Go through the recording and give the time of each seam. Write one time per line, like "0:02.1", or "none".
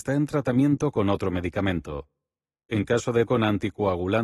0:03.3